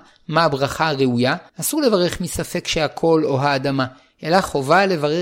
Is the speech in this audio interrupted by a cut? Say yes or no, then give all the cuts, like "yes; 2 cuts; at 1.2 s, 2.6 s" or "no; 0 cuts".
yes; 1 cut; at 1.5 s